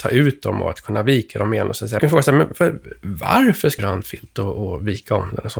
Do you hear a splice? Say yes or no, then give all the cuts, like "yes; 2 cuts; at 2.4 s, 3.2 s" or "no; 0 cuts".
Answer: yes; 2 cuts; at 2.0 s, 3.8 s